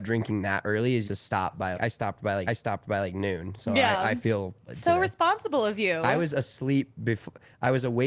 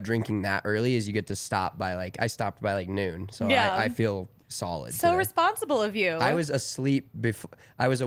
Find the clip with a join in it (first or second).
first